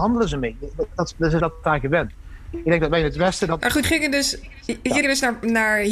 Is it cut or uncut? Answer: cut